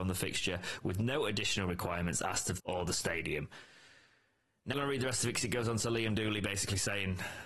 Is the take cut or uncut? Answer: cut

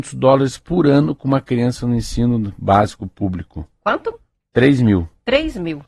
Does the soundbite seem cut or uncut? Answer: uncut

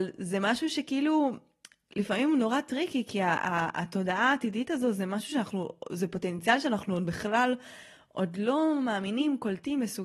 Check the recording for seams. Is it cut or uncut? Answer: uncut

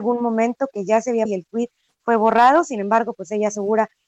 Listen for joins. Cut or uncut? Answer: cut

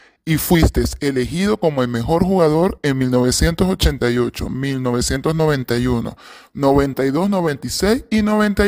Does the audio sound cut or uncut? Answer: uncut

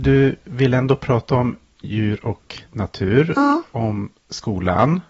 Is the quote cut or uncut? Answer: uncut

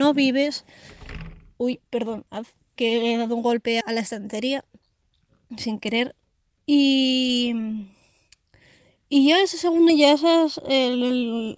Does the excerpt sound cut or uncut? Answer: cut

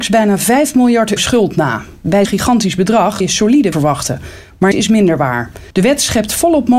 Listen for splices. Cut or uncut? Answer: cut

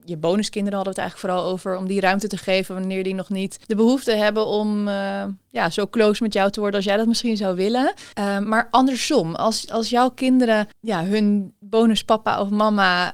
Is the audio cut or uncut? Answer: cut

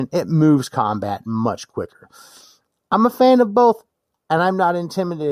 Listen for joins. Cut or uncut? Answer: uncut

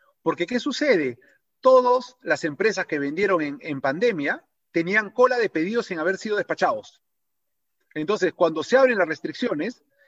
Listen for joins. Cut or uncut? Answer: uncut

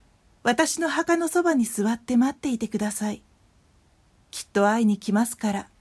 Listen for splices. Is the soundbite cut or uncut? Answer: uncut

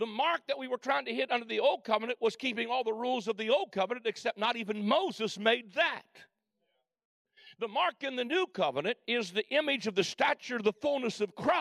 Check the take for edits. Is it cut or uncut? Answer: uncut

